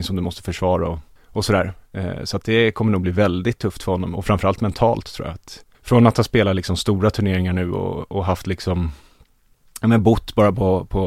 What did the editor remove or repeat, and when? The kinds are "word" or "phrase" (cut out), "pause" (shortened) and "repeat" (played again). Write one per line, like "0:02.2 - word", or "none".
0:01.2 - pause
0:05.7 - pause